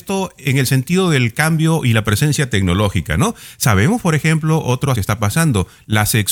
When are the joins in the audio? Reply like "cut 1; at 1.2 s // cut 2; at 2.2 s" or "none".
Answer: cut 1; at 4.9 s